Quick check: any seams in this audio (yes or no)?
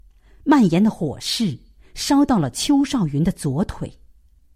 no